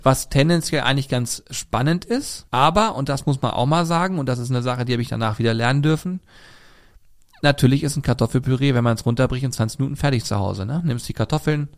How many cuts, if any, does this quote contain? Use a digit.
1